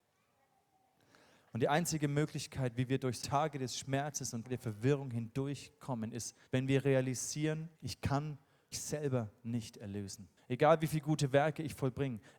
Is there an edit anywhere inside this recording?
yes; 6 cuts; at 3.2 s, 4.4 s, 6.5 s, 7.7 s, 8.7 s, 10.4 s

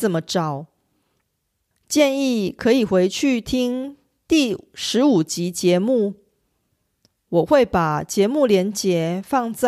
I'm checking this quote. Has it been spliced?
no; 0 cuts

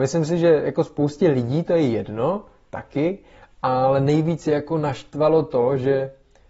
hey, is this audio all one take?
yes; 0 cuts

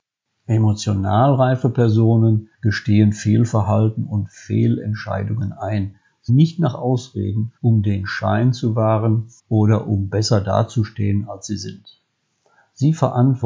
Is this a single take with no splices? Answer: no; 4 cuts; at 2.5 s, 6.3 s, 7.6 s, 9.4 s

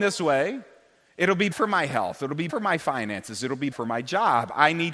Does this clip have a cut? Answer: yes; 3 cuts; at 1.5 s, 2.5 s, 3.7 s

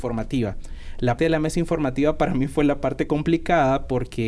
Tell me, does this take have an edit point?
yes; 1 cut; at 1.2 s

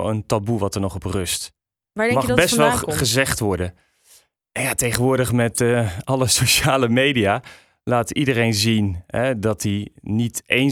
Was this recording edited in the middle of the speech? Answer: no; 0 cuts

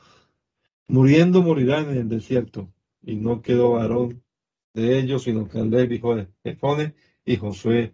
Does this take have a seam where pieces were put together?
no; 0 cuts

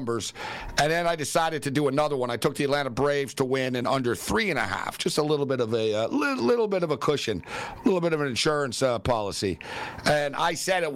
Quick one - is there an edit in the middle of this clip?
no; 0 cuts

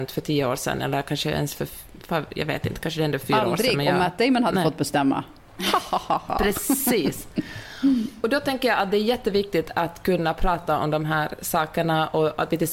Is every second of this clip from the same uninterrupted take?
yes; 0 cuts

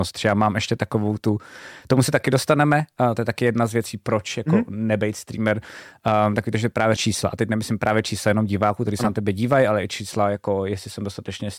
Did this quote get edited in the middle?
yes; 1 cut; at 7.0 s

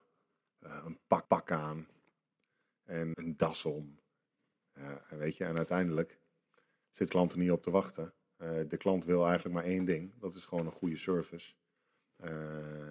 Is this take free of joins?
no; 3 cuts; at 1.2 s, 3.1 s, 7.1 s

